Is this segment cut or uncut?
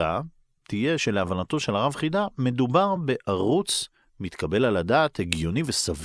uncut